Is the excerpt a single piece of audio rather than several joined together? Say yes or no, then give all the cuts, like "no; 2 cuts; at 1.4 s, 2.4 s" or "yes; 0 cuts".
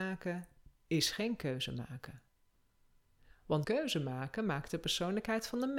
no; 1 cut; at 3.6 s